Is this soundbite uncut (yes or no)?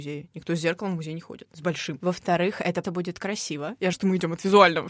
no